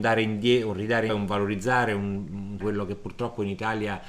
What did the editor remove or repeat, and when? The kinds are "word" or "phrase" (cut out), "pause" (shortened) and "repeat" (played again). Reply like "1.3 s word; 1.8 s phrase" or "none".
1.1 s word; 2.6 s word